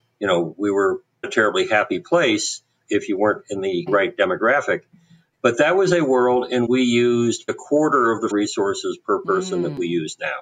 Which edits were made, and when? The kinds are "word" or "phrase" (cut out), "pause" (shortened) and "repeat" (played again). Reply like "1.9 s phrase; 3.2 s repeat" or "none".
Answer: 1.2 s word; 2.9 s word; 3.9 s word; 6.7 s word; 7.5 s word; 8.3 s word